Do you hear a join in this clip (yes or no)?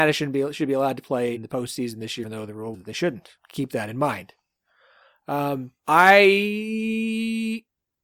yes